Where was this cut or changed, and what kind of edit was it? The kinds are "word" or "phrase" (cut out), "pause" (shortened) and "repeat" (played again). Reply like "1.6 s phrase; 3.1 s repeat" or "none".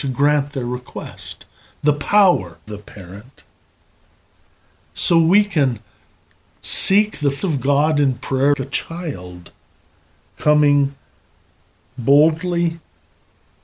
2.7 s word; 7.4 s word; 8.5 s word

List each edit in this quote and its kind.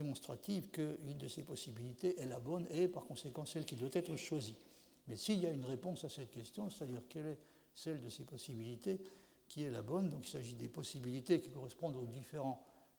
none

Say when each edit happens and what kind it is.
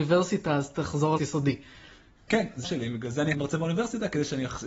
1.2 s word; 2.6 s word; 3.3 s word

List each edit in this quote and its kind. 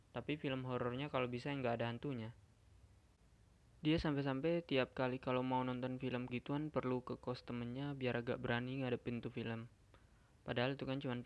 6.3 s word

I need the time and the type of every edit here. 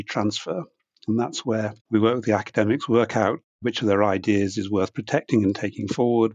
1.8 s pause

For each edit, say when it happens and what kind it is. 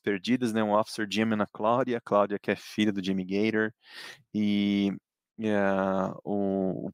none

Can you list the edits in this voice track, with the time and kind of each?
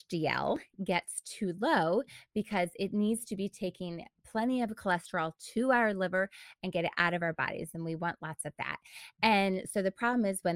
none

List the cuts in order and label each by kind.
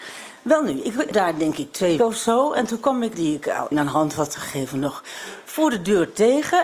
1.1 s word; 2.0 s word; 3.1 s phrase; 3.7 s word

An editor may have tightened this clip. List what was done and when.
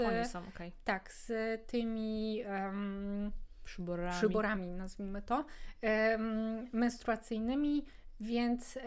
none

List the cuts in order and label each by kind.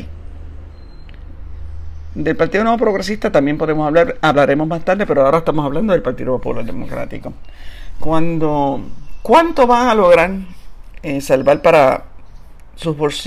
none

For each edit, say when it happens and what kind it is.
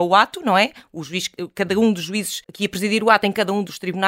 2.4 s pause

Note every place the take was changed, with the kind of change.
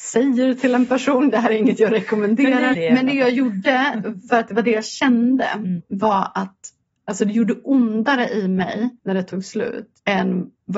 2.7 s word; 9.0 s pause

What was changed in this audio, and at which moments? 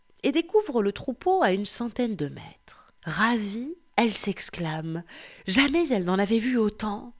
3.0 s pause

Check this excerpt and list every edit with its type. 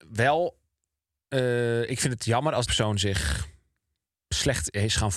2.7 s word

